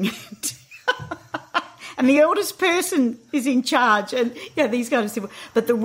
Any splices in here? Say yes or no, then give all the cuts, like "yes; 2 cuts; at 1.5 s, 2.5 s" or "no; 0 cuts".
no; 0 cuts